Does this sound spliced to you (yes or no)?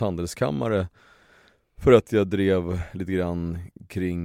no